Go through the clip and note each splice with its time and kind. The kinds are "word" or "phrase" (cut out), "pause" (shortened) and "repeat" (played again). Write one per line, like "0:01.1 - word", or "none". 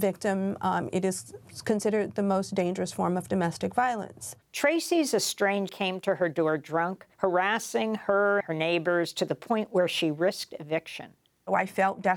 0:04.4 - pause
0:05.7 - phrase
0:07.1 - pause
0:08.4 - word